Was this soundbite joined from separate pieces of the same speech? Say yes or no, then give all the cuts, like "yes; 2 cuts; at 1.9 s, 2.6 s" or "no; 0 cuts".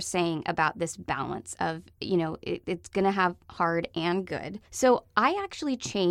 yes; 1 cut; at 4.7 s